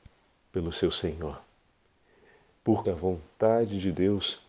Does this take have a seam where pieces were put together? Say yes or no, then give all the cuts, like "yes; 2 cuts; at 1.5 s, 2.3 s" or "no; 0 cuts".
yes; 1 cut; at 2.8 s